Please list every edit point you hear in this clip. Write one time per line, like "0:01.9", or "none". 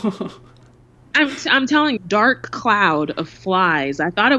0:02.0

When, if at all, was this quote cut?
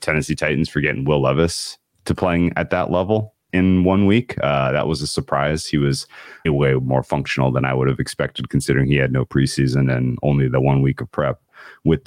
0:03.5
0:06.4

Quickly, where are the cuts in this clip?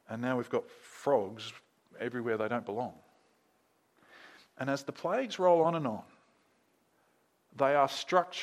none

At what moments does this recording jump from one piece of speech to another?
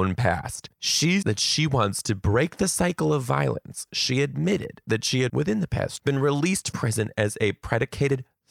0:01.2
0:05.3
0:06.0
0:06.7

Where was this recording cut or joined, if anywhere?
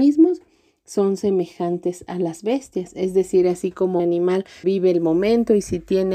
0:04.0
0:04.6

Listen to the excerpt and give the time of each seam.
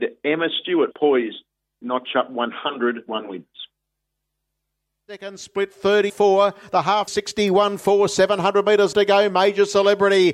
0:00.9
0:01.8
0:03.1
0:06.1
0:07.1
0:08.9

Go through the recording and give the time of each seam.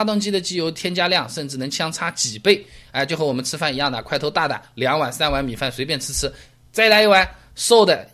none

